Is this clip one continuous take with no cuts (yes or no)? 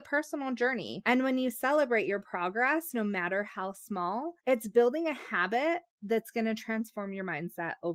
no